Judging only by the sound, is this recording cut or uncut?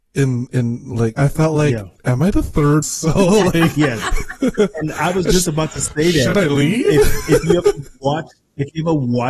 cut